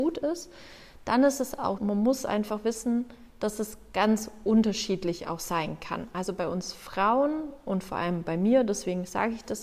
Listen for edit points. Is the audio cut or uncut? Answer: cut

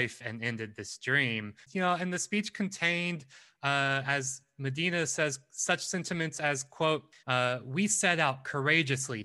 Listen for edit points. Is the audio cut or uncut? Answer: cut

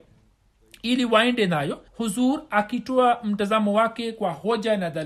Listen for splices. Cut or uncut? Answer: cut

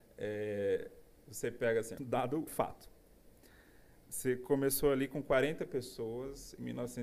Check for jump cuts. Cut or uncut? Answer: cut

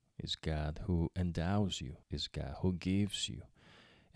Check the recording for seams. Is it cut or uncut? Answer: cut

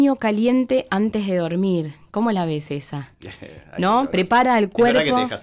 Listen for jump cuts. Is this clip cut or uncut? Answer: uncut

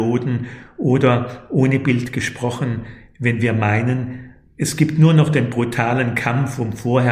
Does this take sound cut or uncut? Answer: uncut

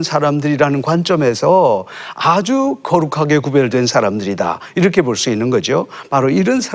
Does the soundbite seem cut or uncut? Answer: uncut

